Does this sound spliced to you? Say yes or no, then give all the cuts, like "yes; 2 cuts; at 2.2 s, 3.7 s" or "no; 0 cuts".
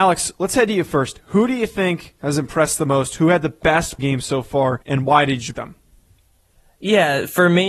yes; 3 cuts; at 4.0 s, 4.8 s, 5.5 s